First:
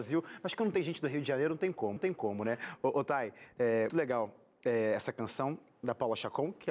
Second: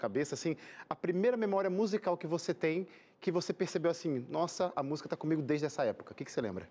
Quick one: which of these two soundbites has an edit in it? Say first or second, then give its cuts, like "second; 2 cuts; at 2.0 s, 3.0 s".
first; 2 cuts; at 2.0 s, 3.9 s